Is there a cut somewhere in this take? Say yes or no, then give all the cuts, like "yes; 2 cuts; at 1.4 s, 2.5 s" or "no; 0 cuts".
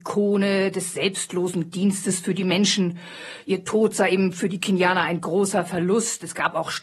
no; 0 cuts